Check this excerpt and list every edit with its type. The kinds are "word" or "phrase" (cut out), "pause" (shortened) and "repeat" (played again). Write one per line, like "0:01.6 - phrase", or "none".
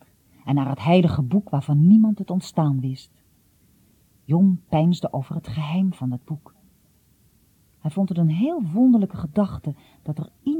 none